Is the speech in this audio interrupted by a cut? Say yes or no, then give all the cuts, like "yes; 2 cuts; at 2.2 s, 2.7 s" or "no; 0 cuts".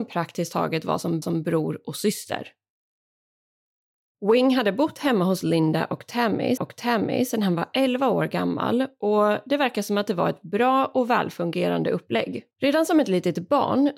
yes; 3 cuts; at 1.2 s, 6.6 s, 12.5 s